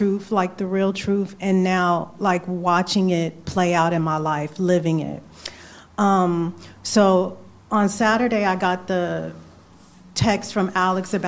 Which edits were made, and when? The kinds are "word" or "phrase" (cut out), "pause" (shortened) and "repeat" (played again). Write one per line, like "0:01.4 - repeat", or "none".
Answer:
none